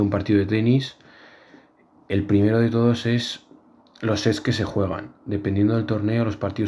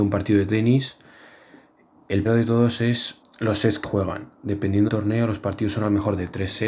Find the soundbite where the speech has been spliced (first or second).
second